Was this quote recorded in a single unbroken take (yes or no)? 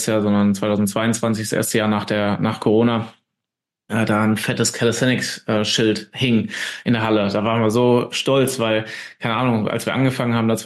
yes